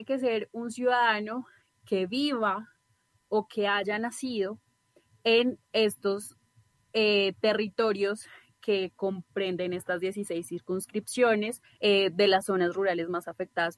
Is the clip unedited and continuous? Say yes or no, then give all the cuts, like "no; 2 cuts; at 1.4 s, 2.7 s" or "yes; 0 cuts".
yes; 0 cuts